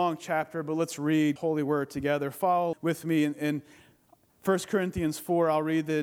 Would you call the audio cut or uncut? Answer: cut